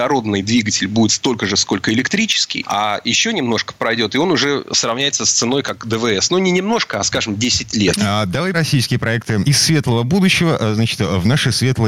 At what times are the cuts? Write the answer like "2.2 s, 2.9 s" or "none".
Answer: 1.1 s, 8.5 s